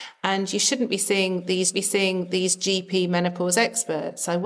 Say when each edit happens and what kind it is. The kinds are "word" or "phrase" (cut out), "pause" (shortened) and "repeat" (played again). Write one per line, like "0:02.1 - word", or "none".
0:01.7 - repeat